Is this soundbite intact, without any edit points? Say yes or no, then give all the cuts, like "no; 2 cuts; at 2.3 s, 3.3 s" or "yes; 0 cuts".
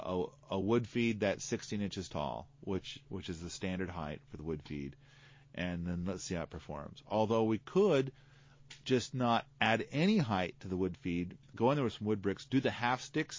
yes; 0 cuts